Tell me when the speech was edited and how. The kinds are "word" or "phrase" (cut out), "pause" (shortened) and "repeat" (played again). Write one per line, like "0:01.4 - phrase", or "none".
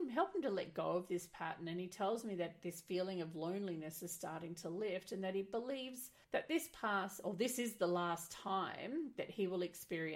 0:06.2 - pause